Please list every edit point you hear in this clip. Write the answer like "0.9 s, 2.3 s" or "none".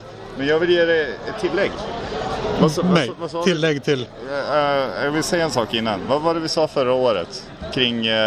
none